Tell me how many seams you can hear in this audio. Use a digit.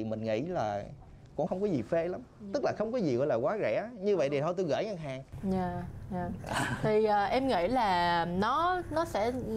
1